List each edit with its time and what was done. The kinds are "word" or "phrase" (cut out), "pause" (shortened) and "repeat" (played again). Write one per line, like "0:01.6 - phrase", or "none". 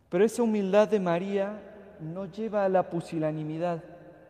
none